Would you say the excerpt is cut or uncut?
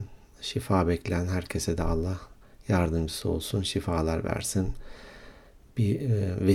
uncut